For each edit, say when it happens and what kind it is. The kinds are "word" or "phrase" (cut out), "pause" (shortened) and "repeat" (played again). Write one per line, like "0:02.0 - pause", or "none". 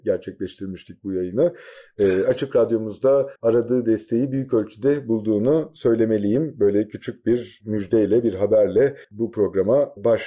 0:03.4 - pause
0:09.0 - pause